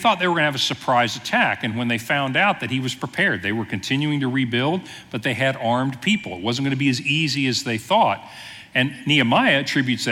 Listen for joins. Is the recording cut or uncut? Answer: uncut